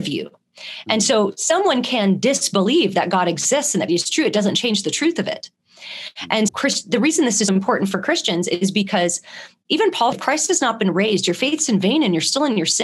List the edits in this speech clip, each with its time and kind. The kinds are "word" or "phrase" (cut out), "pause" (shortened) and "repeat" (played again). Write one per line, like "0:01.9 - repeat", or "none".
0:03.9 - word
0:06.5 - word
0:07.5 - word
0:10.1 - word